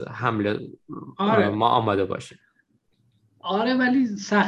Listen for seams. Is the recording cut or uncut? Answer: uncut